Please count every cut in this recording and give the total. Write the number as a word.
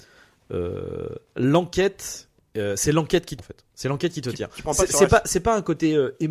two